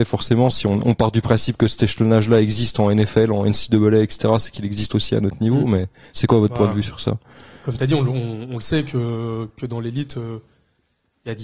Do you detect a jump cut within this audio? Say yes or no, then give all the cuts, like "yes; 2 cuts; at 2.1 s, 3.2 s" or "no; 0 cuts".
no; 0 cuts